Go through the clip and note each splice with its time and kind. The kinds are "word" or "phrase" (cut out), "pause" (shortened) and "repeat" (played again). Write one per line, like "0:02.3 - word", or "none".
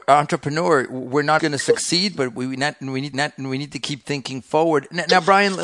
0:01.4 - word
0:03.1 - repeat